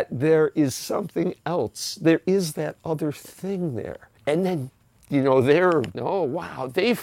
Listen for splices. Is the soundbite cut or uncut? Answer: cut